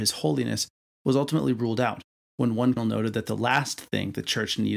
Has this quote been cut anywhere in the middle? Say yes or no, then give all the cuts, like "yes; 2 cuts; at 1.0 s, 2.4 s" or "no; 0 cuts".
yes; 1 cut; at 2.8 s